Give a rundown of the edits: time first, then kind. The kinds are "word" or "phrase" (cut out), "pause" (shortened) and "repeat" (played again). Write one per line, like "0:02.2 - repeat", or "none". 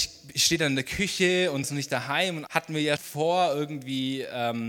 0:01.6 - word
0:02.5 - word
0:03.0 - word